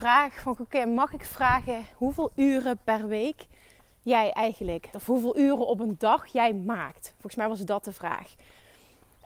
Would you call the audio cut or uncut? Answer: cut